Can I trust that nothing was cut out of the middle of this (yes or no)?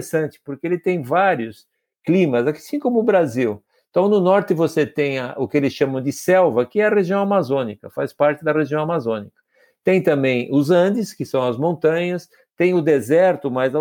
yes